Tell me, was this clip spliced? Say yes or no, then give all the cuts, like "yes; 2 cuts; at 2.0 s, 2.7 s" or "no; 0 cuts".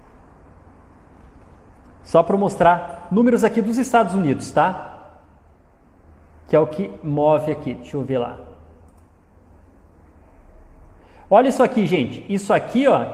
no; 0 cuts